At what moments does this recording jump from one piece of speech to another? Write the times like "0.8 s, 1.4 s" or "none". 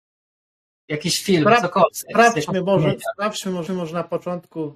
3.7 s